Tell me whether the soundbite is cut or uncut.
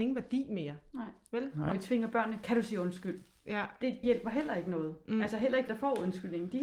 cut